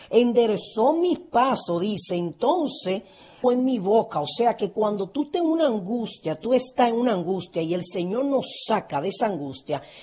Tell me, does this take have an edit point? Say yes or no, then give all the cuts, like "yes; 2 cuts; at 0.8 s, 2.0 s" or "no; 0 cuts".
yes; 1 cut; at 3.4 s